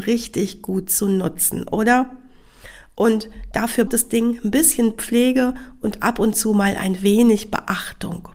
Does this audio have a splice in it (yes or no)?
yes